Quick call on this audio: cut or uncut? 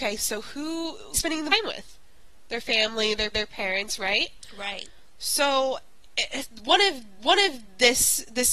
cut